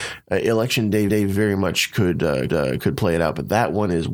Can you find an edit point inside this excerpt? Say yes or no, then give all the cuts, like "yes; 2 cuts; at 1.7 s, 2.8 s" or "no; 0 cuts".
yes; 2 cuts; at 1.1 s, 2.5 s